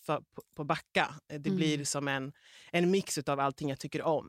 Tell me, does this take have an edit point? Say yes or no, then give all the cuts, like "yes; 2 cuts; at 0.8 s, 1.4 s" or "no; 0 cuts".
no; 0 cuts